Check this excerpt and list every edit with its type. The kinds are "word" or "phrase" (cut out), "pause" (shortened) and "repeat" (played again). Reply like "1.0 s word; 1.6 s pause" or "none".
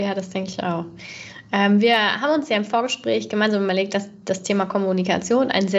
none